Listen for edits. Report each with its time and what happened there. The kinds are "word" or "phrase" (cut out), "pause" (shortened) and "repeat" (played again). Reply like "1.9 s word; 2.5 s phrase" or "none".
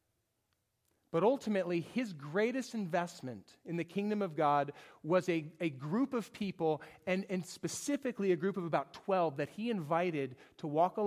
none